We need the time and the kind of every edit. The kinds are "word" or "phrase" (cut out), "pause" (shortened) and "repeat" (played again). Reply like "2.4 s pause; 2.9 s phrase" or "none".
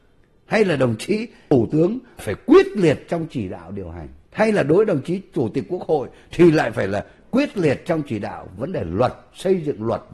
4.2 s pause